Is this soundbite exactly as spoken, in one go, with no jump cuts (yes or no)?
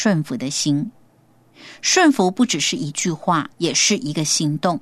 no